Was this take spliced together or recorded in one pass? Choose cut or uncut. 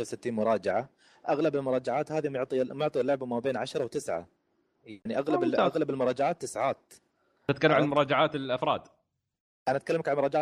uncut